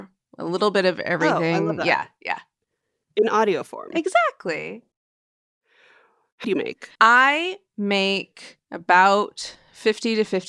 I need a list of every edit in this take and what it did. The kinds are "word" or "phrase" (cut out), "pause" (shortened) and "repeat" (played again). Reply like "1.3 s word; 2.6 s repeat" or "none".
6.4 s phrase; 7.0 s pause; 8.6 s pause